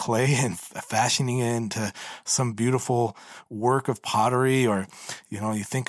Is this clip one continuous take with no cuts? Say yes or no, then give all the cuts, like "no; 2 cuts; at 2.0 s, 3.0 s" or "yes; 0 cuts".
yes; 0 cuts